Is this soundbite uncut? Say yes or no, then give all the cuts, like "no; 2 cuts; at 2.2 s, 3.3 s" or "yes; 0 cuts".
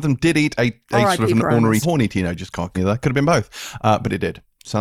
no; 2 cuts; at 1.8 s, 2.7 s